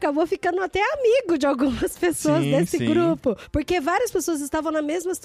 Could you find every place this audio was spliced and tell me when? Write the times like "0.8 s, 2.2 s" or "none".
none